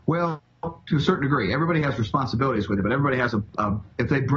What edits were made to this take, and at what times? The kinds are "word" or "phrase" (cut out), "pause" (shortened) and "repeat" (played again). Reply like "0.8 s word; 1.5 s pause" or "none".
none